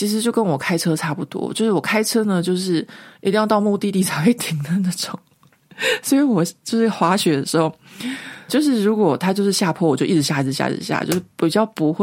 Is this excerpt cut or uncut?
cut